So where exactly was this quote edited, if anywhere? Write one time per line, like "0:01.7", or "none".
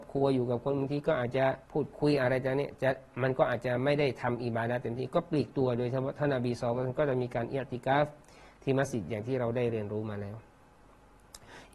0:01.6